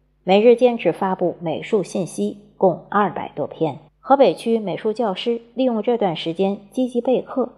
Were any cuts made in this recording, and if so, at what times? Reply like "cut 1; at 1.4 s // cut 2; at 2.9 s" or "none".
cut 1; at 3.9 s